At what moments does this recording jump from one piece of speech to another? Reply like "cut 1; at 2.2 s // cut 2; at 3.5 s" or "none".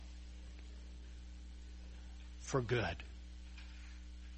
none